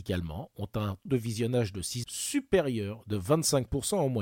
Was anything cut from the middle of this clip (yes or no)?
yes